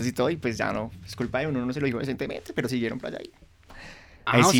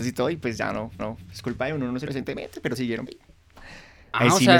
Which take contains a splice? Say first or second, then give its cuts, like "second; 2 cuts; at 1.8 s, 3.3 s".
second; 3 cuts; at 1.0 s, 2.1 s, 3.1 s